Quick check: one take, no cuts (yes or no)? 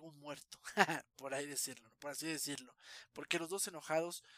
yes